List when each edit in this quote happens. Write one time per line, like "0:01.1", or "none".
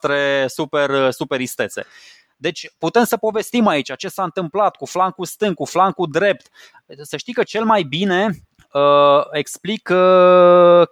none